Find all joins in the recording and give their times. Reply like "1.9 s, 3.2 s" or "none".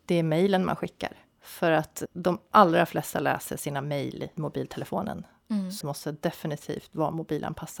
2.1 s, 4.4 s, 5.8 s